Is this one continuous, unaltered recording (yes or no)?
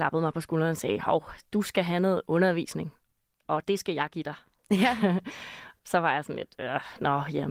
yes